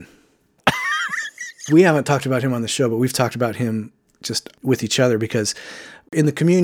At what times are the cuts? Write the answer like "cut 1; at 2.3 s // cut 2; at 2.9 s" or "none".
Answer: none